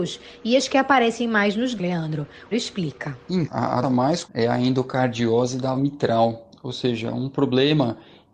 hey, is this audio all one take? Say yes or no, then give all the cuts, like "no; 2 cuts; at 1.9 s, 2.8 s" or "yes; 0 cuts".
no; 6 cuts; at 1.8 s, 2.5 s, 3.5 s, 3.8 s, 4.2 s, 5.8 s